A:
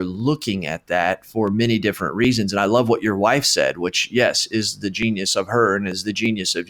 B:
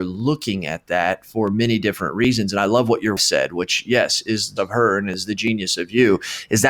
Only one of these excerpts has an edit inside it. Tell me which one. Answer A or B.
B